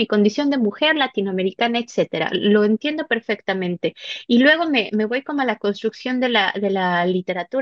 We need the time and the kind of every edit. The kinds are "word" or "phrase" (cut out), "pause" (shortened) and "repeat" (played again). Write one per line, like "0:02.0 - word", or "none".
0:04.9 - word